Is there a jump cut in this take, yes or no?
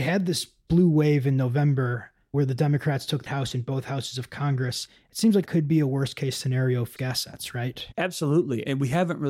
yes